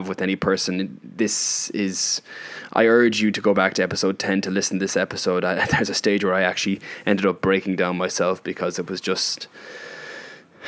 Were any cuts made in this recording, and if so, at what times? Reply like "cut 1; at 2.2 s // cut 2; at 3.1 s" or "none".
none